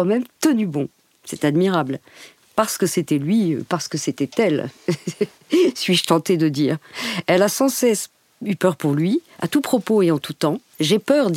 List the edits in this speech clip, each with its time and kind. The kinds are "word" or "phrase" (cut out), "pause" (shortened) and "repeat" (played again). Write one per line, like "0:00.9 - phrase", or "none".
none